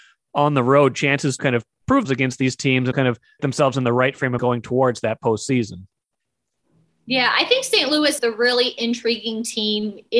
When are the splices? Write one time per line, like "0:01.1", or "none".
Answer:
0:01.4
0:02.0
0:02.9
0:03.4
0:04.4
0:08.2